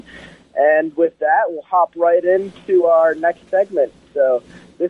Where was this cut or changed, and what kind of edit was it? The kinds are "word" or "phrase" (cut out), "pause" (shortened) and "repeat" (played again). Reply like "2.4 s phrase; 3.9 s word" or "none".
none